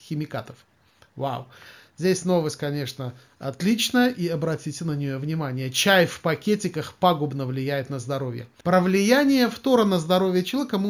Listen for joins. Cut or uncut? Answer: uncut